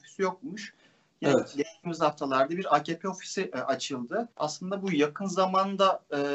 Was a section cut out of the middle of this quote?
yes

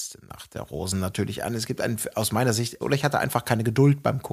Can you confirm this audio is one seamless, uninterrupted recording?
no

